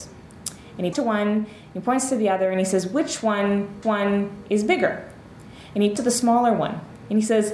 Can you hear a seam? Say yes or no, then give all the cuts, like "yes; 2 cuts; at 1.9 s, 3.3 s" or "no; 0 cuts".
yes; 3 cuts; at 0.9 s, 3.8 s, 6.0 s